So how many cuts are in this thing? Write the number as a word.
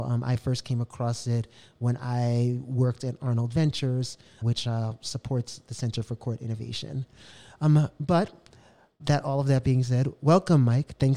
two